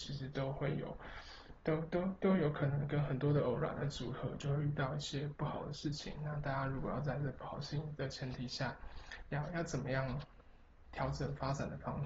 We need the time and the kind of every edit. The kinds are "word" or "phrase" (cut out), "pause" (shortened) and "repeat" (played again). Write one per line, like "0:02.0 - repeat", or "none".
0:10.8 - word